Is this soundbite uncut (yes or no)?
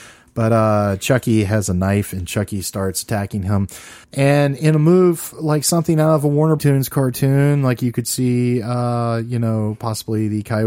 no